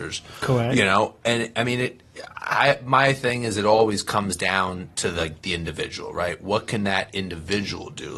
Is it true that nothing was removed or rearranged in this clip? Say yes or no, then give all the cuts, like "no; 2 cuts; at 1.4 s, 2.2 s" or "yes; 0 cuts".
yes; 0 cuts